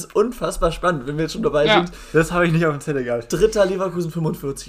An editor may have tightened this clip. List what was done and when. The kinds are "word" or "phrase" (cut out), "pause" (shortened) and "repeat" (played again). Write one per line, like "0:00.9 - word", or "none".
none